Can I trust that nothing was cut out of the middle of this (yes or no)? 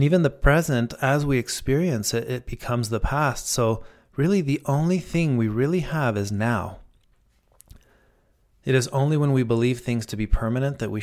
yes